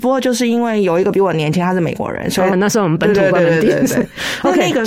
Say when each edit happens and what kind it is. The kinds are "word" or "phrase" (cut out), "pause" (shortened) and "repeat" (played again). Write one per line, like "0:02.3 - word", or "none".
0:02.5 - phrase